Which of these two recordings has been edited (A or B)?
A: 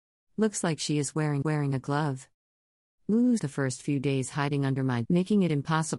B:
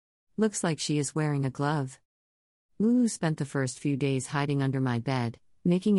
A